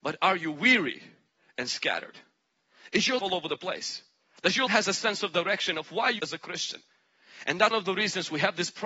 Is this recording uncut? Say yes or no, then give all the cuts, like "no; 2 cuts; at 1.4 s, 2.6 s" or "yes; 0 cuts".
no; 4 cuts; at 3.2 s, 4.7 s, 6.2 s, 7.7 s